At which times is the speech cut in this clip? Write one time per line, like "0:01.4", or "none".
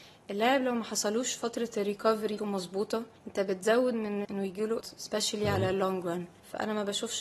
0:02.4
0:03.2
0:04.2
0:04.8